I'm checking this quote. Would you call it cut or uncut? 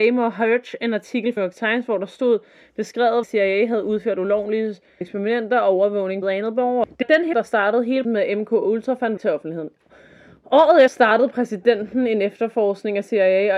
cut